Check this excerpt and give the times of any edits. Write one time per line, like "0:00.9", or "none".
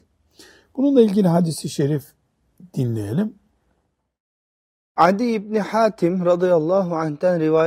none